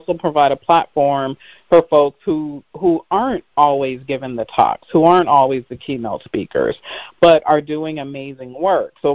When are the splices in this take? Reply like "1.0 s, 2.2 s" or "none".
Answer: none